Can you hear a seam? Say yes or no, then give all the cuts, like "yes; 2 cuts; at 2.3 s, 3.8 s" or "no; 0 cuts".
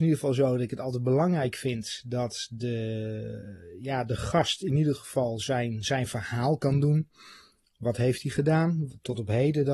no; 0 cuts